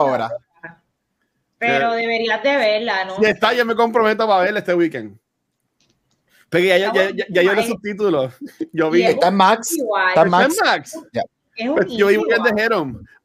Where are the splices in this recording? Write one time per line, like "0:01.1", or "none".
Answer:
none